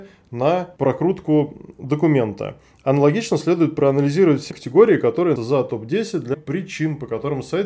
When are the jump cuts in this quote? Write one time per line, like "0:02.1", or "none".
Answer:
0:04.5
0:05.4
0:06.3